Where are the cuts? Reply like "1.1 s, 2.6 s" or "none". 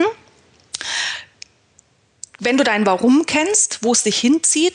none